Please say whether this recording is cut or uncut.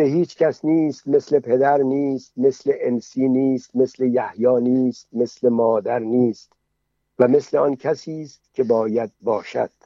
uncut